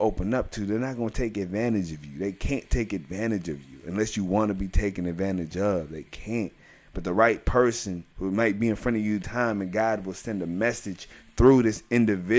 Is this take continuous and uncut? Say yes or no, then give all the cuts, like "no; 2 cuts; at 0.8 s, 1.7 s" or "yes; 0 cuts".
no; 1 cut; at 9.2 s